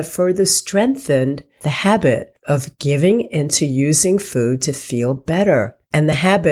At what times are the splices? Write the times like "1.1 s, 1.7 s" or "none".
none